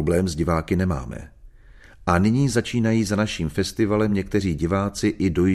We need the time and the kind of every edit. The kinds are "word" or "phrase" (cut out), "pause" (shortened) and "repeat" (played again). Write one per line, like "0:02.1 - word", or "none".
none